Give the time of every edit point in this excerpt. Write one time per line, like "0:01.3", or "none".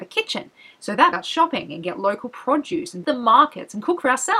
0:01.1
0:03.0